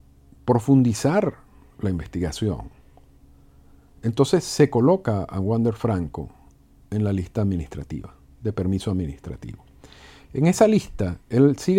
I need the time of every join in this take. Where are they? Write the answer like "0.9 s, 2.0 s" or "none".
none